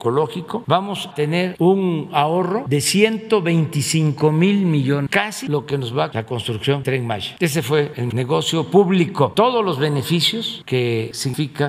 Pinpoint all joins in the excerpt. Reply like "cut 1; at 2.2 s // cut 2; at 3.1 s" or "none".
cut 1; at 1.1 s // cut 2; at 1.6 s // cut 3; at 6.1 s // cut 4; at 6.8 s // cut 5; at 8.1 s // cut 6; at 9.3 s